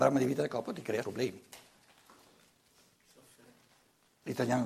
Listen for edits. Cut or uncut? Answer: cut